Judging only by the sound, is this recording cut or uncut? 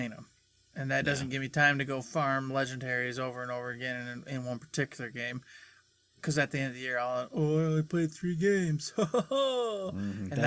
uncut